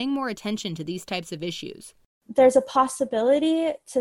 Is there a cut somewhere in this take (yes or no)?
no